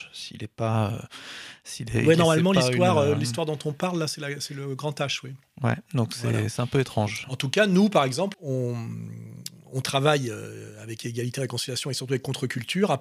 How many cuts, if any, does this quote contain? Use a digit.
1